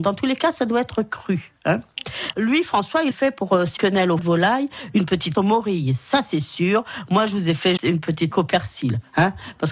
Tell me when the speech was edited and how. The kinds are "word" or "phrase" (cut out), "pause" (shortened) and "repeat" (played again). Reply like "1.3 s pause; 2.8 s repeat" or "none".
2.3 s word; 3.1 s word; 3.8 s word; 4.2 s word; 5.3 s word; 7.8 s word; 8.3 s word